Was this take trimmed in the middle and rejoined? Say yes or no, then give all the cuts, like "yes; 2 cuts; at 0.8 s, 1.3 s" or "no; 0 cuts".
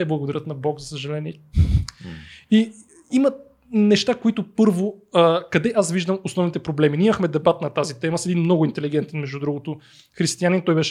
no; 0 cuts